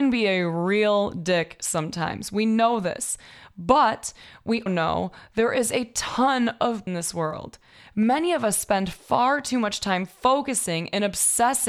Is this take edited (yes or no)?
yes